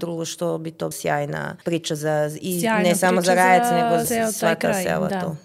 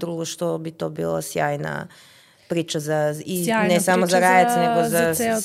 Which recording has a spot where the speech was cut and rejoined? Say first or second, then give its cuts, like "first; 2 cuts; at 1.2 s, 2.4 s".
first; 3 cuts; at 0.9 s, 1.6 s, 4.0 s